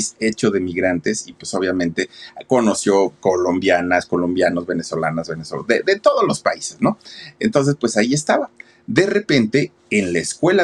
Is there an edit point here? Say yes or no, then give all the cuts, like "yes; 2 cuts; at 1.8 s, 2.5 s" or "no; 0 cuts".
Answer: no; 0 cuts